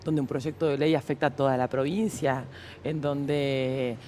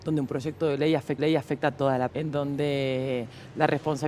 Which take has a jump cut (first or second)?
second